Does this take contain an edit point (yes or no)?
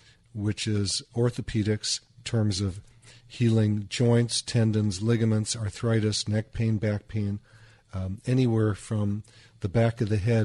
no